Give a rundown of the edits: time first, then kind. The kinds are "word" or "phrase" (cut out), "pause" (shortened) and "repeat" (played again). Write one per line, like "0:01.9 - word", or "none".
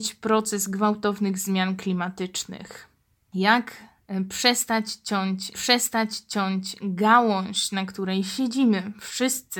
0:05.5 - repeat